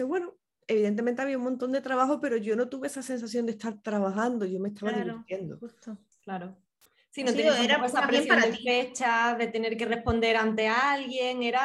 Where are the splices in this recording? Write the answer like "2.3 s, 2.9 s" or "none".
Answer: none